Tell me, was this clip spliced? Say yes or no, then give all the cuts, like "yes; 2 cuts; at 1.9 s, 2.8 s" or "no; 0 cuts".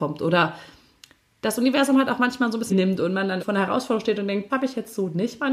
yes; 3 cuts; at 2.7 s, 3.4 s, 4.5 s